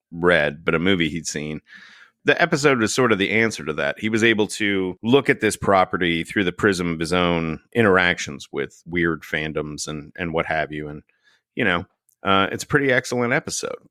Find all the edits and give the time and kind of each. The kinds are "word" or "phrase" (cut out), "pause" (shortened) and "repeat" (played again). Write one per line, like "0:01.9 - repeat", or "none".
none